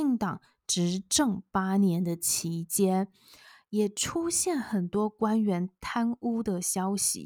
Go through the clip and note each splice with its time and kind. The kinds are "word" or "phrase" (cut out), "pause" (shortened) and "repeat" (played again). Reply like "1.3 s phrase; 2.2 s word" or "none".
none